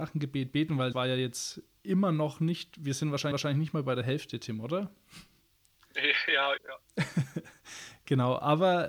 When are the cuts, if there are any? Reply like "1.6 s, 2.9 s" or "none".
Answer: 0.9 s, 3.3 s, 6.6 s